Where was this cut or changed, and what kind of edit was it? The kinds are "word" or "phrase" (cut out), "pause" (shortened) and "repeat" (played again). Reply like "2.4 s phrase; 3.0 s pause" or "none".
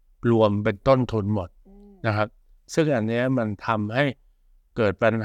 none